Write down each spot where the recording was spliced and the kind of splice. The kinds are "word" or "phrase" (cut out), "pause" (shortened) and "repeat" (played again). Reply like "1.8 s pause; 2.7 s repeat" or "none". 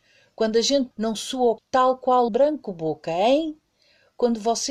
0.9 s word; 1.6 s word; 2.3 s word